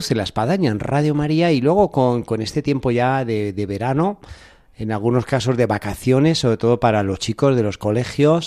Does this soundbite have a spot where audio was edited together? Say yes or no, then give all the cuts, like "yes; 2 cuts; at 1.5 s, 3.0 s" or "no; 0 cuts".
no; 0 cuts